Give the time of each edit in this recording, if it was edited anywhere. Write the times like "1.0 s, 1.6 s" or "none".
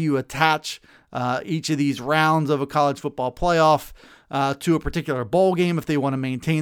none